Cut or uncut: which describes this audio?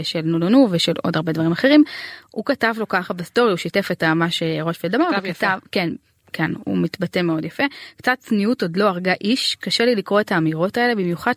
uncut